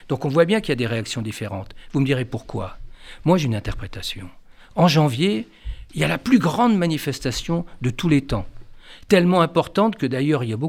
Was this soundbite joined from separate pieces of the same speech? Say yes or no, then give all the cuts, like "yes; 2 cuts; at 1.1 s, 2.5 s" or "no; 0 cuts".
no; 0 cuts